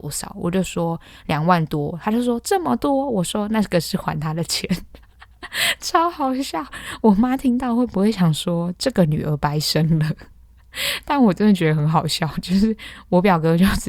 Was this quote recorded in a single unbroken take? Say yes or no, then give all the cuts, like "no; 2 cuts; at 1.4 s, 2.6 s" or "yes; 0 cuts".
no; 1 cut; at 5.0 s